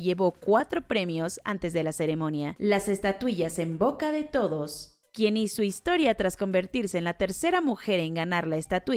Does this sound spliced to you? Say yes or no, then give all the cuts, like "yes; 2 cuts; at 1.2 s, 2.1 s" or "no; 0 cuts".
no; 0 cuts